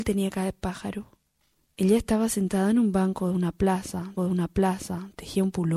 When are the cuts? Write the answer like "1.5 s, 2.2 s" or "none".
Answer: 4.2 s